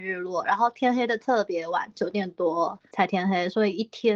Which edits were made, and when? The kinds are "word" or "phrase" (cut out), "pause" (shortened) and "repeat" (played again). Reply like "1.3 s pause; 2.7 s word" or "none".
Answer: 2.9 s pause

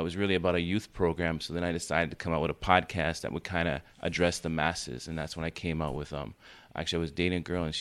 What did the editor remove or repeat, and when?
3.9 s pause

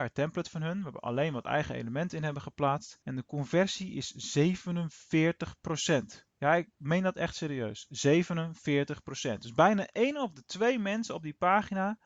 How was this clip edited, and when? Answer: 3.0 s pause; 6.3 s pause

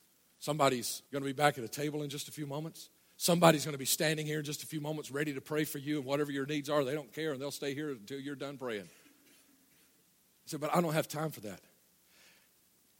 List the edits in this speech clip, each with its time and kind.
1.1 s pause; 3.0 s pause

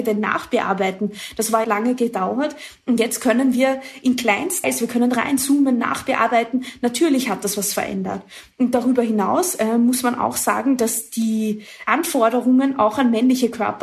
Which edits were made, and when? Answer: 1.6 s phrase; 4.6 s word

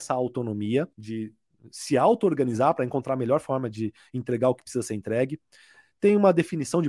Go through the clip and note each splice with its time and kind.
0.9 s pause

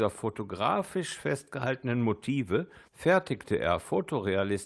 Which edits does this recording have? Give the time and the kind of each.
2.9 s pause

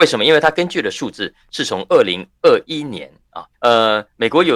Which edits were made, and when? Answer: 3.5 s pause

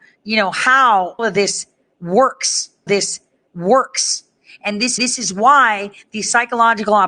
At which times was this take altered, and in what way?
1.2 s word; 2.9 s repeat; 5.0 s repeat

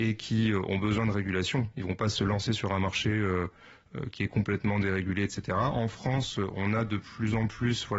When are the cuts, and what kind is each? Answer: none

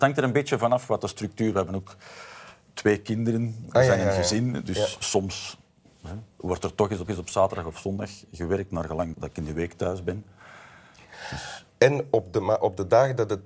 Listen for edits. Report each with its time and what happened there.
6.3 s pause; 7.1 s repeat; 9.1 s word

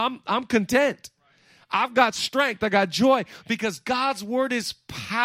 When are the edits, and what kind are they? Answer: none

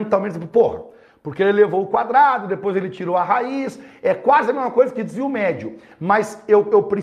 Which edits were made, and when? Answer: none

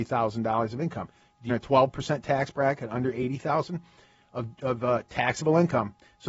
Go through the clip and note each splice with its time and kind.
1.5 s phrase

